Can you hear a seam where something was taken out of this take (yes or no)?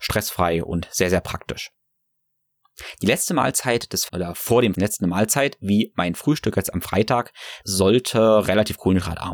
yes